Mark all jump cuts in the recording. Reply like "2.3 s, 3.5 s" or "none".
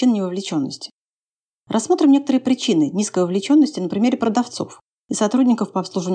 none